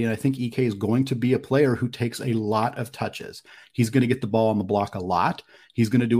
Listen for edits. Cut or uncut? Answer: uncut